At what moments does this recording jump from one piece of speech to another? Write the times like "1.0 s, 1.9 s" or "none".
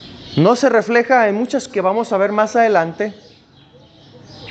1.7 s